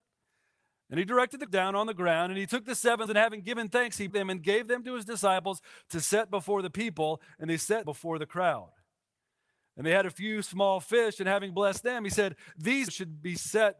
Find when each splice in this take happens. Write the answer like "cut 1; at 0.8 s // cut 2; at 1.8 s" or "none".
cut 1; at 1.5 s // cut 2; at 3.1 s // cut 3; at 4.1 s // cut 4; at 7.8 s // cut 5; at 12.9 s